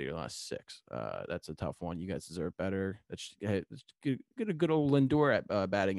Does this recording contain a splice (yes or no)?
yes